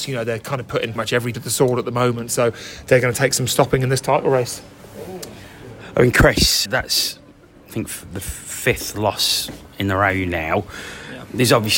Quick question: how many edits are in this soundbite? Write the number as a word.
four